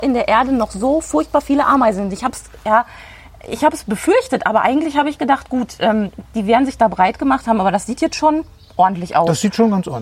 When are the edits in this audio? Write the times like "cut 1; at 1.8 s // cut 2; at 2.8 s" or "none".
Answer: none